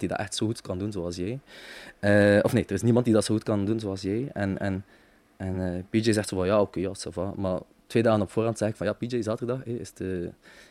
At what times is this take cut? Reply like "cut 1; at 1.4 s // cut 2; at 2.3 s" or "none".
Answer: none

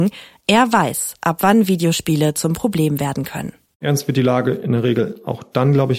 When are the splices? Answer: none

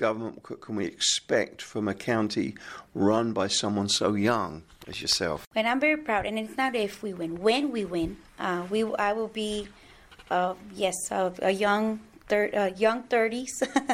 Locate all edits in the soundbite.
cut 1; at 8.3 s

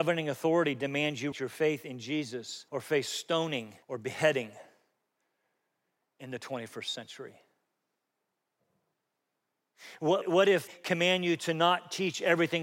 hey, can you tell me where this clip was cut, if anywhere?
cut 1; at 1.3 s // cut 2; at 2.7 s // cut 3; at 3.8 s // cut 4; at 10.2 s // cut 5; at 10.7 s

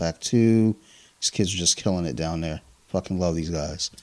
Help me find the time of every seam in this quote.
none

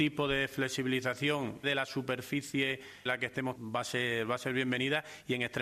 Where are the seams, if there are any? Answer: cut 1; at 1.6 s // cut 2; at 3.1 s // cut 3; at 3.6 s

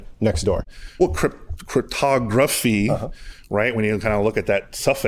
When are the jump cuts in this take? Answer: none

